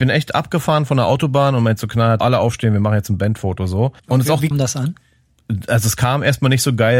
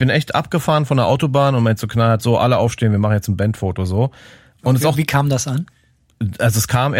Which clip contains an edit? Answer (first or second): first